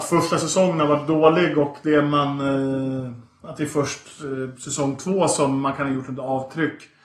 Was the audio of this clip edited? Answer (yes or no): no